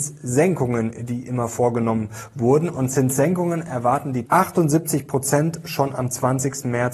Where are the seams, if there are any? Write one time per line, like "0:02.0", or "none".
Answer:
0:04.3